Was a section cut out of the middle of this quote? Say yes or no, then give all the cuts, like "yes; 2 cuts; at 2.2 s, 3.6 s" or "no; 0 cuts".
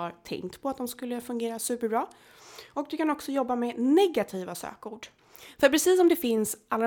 no; 0 cuts